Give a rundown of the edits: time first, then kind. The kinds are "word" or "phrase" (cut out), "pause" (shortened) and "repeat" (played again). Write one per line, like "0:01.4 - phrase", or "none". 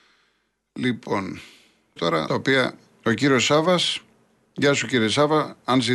0:02.0 - word
0:02.3 - phrase